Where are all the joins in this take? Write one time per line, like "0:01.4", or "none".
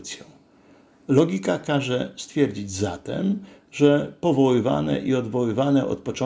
none